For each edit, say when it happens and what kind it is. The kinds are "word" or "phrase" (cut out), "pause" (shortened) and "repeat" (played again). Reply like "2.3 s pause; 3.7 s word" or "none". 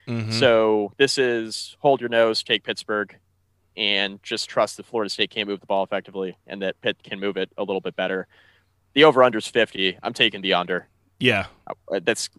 none

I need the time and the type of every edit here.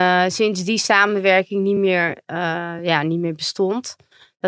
none

